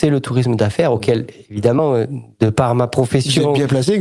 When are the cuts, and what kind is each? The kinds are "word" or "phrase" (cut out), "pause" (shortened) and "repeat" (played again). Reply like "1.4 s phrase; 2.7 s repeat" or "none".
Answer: none